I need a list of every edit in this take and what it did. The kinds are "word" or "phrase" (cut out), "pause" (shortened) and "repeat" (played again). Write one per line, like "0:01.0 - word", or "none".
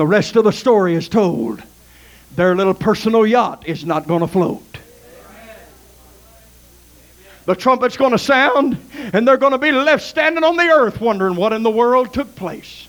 none